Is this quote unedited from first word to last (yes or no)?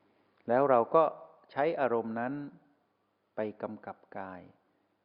yes